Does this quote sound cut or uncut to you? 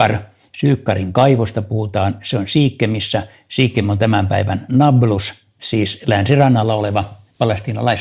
uncut